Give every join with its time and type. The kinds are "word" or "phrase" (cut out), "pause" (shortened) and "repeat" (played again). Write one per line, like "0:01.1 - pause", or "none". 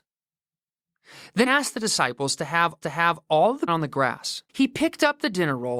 0:01.5 - word
0:02.8 - repeat
0:03.7 - phrase
0:04.5 - pause